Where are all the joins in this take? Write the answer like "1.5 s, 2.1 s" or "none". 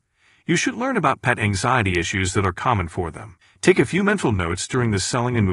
3.4 s